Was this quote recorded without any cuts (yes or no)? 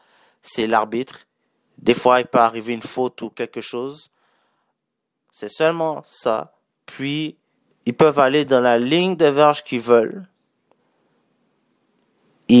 yes